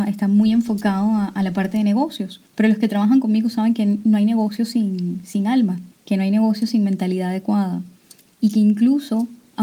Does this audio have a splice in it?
yes; 3 cuts; at 2.5 s, 5.9 s, 8.2 s

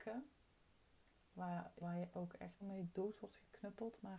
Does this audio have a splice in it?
yes; 3 cuts; at 1.8 s, 2.1 s, 2.6 s

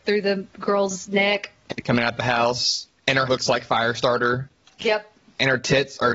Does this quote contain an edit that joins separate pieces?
yes; 1 cut; at 3.3 s

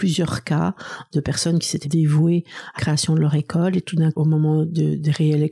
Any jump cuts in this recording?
yes; 3 cuts; at 1.8 s, 2.8 s, 4.1 s

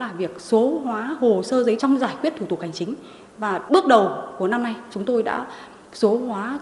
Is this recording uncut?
no; 1 cut; at 1.8 s

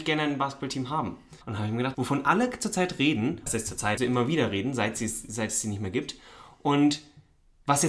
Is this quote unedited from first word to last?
no; 4 cuts; at 1.4 s, 1.9 s, 3.5 s, 4.0 s

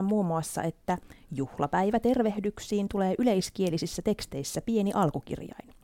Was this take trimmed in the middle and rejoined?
no; 0 cuts

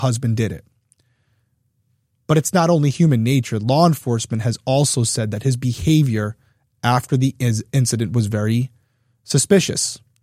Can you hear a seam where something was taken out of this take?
no; 0 cuts

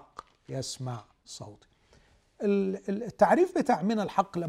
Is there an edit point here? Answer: no; 0 cuts

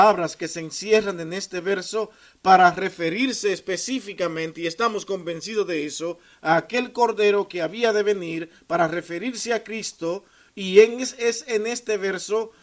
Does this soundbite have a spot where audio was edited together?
no; 0 cuts

